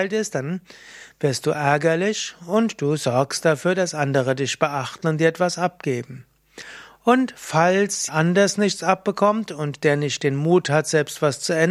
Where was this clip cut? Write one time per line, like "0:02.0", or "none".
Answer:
0:08.1